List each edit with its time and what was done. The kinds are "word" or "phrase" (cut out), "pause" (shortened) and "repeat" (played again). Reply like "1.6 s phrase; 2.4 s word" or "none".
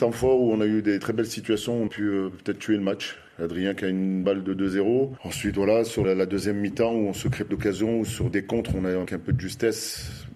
1.0 s word; 1.9 s word; 4.2 s word; 6.0 s word; 7.5 s word; 8.3 s word; 9.1 s word